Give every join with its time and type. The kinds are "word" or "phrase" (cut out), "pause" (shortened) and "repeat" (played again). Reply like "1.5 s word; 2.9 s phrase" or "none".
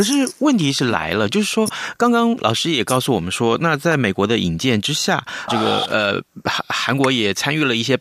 5.5 s word